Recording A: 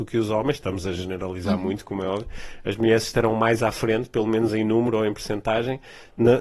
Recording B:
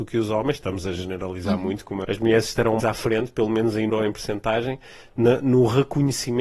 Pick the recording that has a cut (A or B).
B